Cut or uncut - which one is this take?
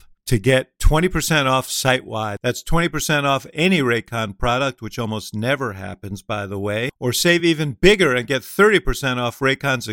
uncut